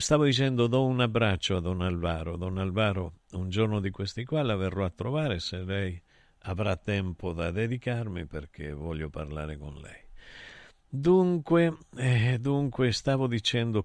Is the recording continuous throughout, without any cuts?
yes; 0 cuts

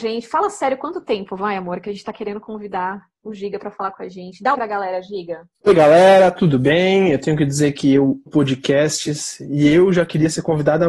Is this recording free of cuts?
no; 3 cuts; at 4.5 s, 5.5 s, 8.3 s

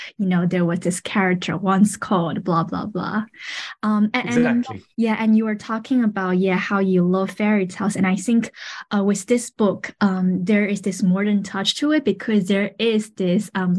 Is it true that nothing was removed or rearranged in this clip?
no; 1 cut; at 4.9 s

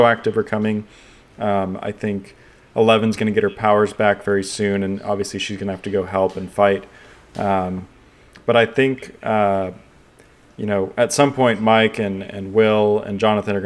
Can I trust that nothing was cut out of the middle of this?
yes; 0 cuts

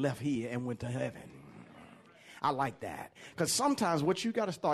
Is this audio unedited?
yes; 0 cuts

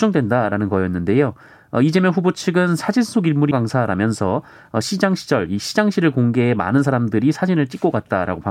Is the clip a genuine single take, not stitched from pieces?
no; 1 cut; at 3.5 s

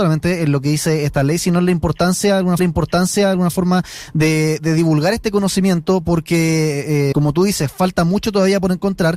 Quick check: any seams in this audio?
yes; 2 cuts; at 2.6 s, 7.1 s

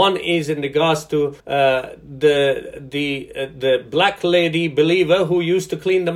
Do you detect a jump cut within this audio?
yes; 1 cut; at 1.4 s

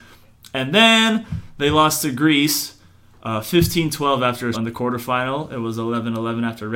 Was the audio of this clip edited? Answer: yes; 1 cut; at 4.5 s

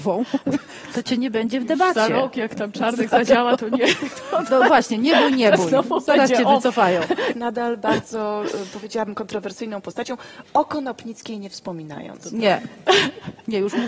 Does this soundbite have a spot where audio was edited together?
yes; 1 cut; at 7.3 s

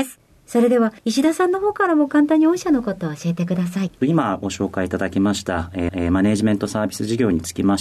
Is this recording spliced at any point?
yes; 2 cuts; at 1.0 s, 5.9 s

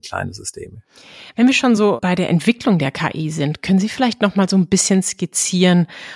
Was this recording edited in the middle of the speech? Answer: no; 0 cuts

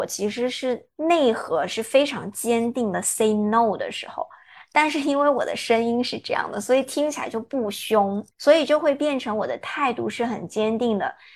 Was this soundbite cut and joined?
yes; 2 cuts; at 0.9 s, 8.3 s

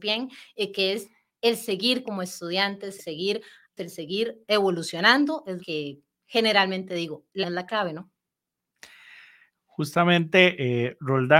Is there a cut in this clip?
yes; 5 cuts; at 2.0 s, 3.0 s, 3.8 s, 5.6 s, 7.4 s

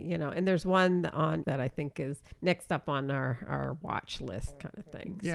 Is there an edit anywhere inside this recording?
yes; 2 cuts; at 1.4 s, 2.3 s

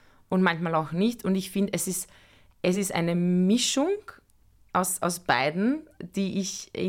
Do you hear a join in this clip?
no; 0 cuts

